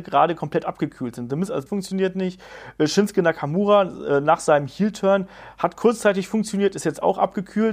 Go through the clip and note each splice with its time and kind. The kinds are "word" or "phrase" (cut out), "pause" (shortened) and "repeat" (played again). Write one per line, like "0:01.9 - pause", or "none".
0:01.7 - word

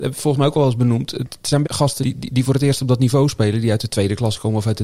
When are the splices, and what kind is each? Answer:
0:01.6 - phrase
0:02.0 - word

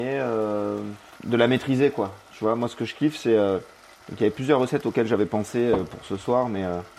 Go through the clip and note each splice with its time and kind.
none

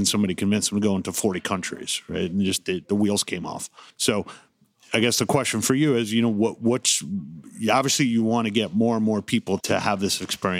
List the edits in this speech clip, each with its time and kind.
0:03.9 - pause
0:09.6 - word

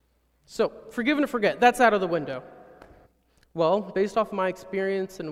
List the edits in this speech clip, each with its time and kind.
0:03.1 - pause

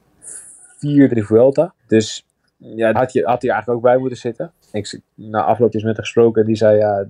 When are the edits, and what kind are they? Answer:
0:01.1 - word
0:01.8 - pause
0:02.9 - word
0:04.6 - pause
0:05.7 - word

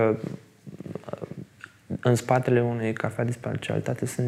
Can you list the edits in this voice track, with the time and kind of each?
none

